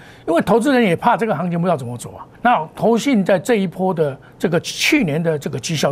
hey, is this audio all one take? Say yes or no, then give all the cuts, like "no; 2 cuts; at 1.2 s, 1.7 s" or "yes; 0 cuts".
no; 2 cuts; at 2.3 s, 4.3 s